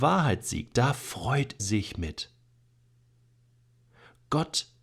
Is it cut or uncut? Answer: cut